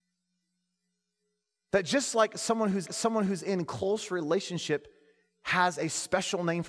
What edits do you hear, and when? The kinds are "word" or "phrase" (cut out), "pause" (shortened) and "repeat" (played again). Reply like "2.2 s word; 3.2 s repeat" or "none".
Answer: 2.9 s repeat